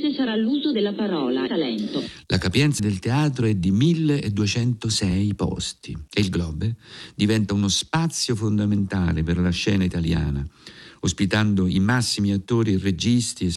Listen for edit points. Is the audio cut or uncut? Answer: cut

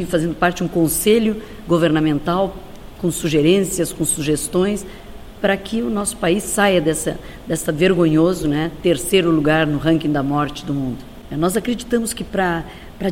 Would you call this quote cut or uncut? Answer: uncut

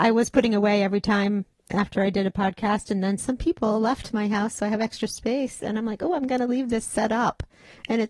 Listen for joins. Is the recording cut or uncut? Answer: uncut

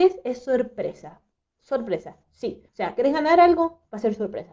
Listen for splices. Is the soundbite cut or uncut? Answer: cut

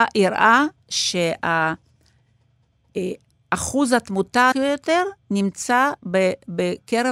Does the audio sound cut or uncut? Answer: cut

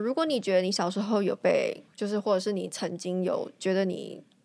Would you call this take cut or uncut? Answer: cut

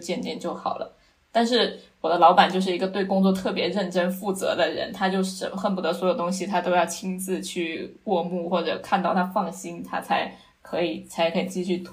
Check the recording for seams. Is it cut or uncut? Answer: uncut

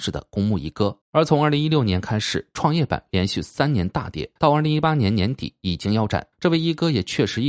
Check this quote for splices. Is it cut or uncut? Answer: cut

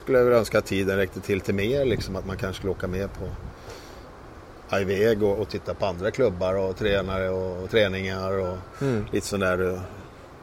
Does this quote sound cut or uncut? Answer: uncut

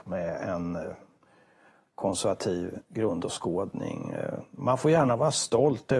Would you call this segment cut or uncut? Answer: uncut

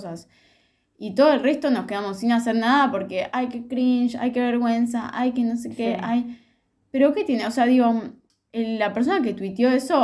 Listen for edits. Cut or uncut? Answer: uncut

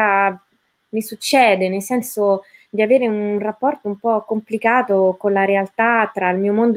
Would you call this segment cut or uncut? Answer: uncut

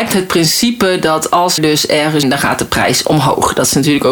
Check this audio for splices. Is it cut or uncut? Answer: cut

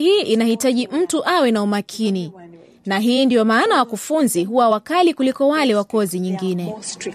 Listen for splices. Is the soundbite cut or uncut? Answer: uncut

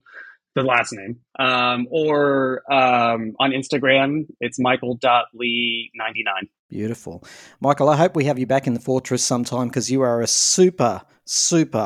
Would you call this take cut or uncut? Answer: cut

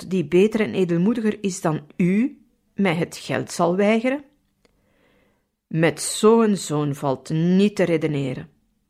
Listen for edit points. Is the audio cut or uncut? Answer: uncut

